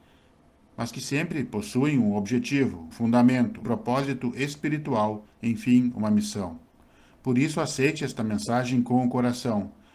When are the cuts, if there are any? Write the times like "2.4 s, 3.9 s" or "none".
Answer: 2.9 s, 3.6 s